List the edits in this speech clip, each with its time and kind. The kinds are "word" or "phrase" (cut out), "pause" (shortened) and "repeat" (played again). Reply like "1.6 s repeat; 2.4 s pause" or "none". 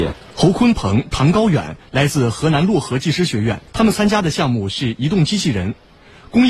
3.7 s pause